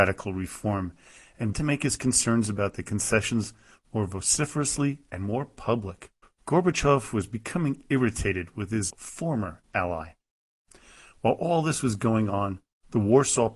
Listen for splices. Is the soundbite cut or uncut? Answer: cut